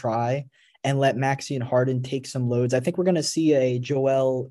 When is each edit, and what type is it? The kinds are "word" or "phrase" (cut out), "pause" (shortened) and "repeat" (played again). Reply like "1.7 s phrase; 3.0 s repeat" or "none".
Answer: none